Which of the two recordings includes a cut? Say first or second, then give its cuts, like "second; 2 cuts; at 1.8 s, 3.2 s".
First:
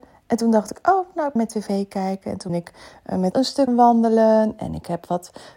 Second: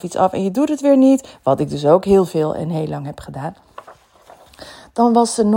first; 4 cuts; at 1.4 s, 2.5 s, 3.3 s, 3.7 s